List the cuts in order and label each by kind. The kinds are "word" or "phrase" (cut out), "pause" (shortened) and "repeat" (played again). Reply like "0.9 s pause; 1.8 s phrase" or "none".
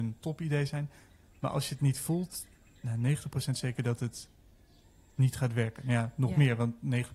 none

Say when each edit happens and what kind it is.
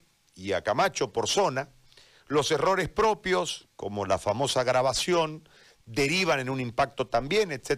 none

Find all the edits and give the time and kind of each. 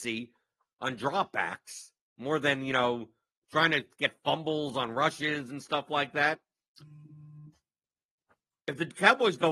none

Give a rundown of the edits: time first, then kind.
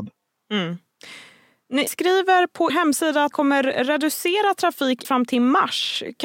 1.9 s word; 2.7 s word; 3.3 s word; 5.0 s word

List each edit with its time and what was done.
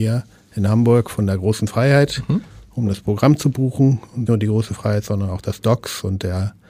4.3 s phrase

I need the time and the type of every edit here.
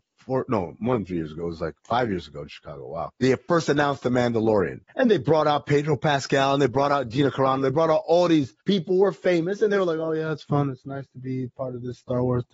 3.2 s pause; 4.9 s pause; 8.6 s pause

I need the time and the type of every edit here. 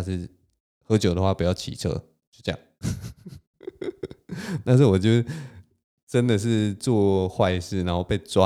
none

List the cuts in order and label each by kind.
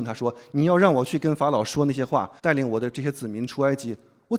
2.4 s pause

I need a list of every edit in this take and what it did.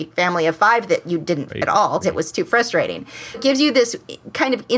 1.5 s word; 2.0 s word; 3.3 s word

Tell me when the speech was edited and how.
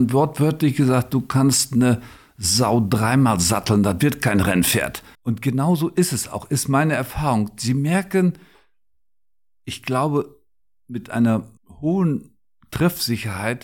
5.1 s pause; 11.6 s pause

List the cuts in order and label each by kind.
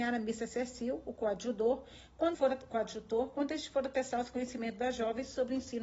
2.3 s word

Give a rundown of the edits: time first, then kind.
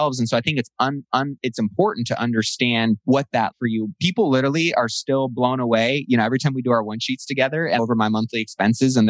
1.1 s repeat; 3.0 s pause; 3.5 s phrase; 7.8 s phrase

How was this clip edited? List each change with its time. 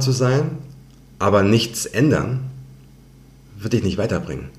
none

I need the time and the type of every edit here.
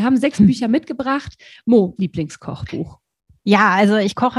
2.0 s phrase

